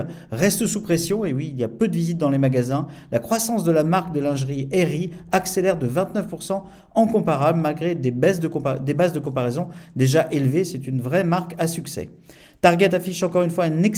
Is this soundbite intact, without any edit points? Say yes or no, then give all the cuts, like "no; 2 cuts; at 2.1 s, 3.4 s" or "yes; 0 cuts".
yes; 0 cuts